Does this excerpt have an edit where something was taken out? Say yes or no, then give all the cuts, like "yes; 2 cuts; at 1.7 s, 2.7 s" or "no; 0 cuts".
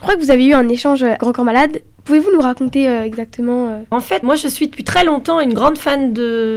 yes; 2 cuts; at 1.2 s, 3.9 s